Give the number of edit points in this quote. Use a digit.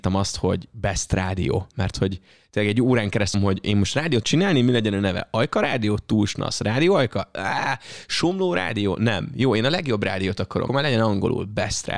3